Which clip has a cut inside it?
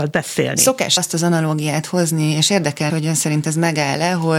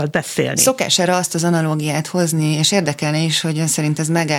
first; 2 cuts; at 1.0 s, 2.9 s

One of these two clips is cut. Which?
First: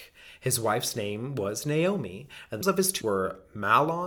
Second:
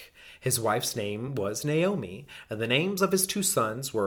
first; 2 cuts; at 2.6 s, 3.0 s

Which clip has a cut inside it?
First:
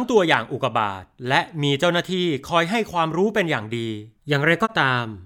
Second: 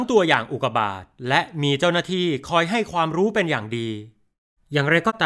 first; 1 cut; at 4.2 s

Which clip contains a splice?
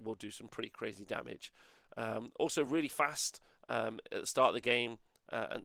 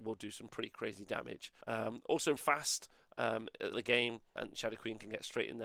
second; 4 cuts; at 1.6 s, 2.4 s, 3.7 s, 4.4 s

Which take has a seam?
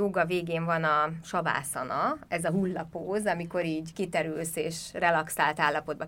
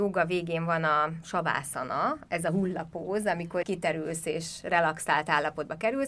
second; 1 cut; at 3.6 s

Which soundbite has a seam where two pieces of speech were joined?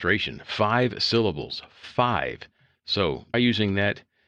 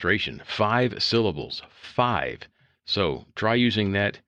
first; 1 cut; at 3.3 s

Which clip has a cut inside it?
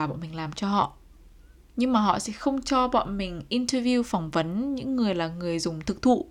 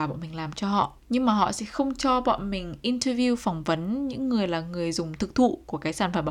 second; 1 cut; at 1.0 s

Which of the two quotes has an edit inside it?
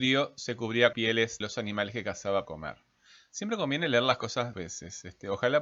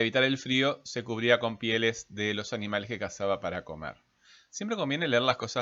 first; 4 cuts; at 0.9 s, 1.4 s, 2.4 s, 4.5 s

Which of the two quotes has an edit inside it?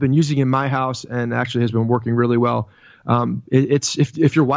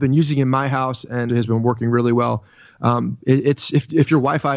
second; 1 cut; at 1.3 s

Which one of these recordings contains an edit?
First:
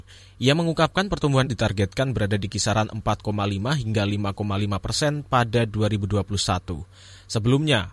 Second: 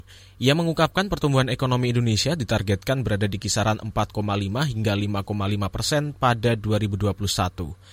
first; 1 cut; at 1.5 s

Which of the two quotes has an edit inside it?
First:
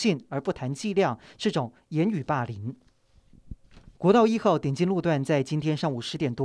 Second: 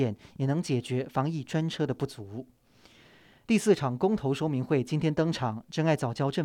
first; 1 cut; at 3.9 s

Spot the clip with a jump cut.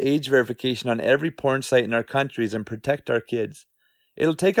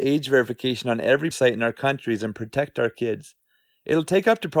second; 1 cut; at 1.3 s

